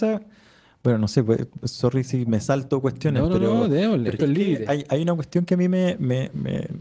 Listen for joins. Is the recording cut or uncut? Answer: cut